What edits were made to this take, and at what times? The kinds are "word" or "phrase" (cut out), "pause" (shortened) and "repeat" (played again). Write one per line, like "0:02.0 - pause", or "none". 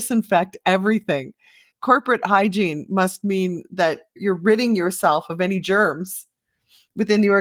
none

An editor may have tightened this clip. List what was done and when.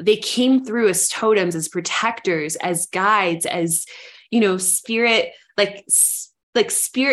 none

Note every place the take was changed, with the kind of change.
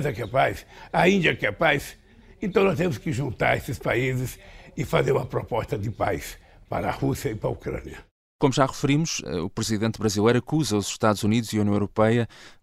none

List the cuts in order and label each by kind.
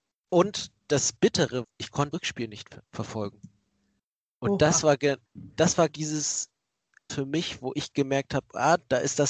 0:01.6 - word
0:02.1 - word
0:02.8 - pause
0:05.3 - pause
0:05.9 - word
0:07.1 - word

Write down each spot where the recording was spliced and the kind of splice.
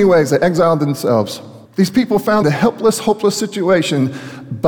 0:01.6 - pause
0:02.4 - phrase

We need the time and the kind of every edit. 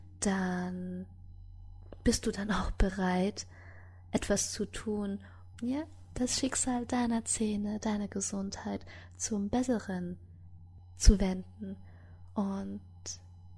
0:05.5 - word

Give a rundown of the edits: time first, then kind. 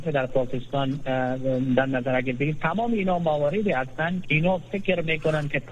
0:04.2 - word

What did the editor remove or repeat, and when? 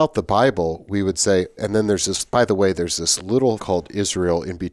0:01.6 - word
0:02.3 - pause
0:03.6 - word

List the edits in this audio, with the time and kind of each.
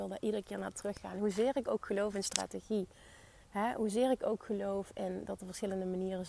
0:03.4 - pause

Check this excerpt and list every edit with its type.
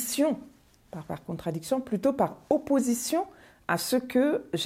none

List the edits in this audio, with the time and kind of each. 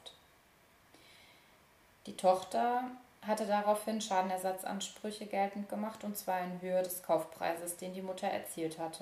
none

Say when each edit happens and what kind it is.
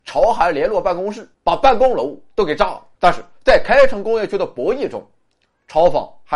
0:01.3 - word
0:02.9 - pause

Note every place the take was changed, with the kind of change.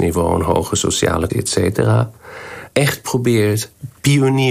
0:01.3 - word
0:02.7 - word

